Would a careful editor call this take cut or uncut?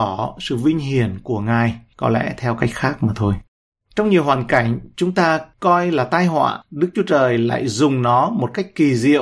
uncut